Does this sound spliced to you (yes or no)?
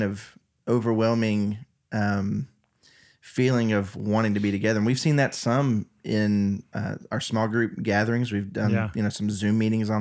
no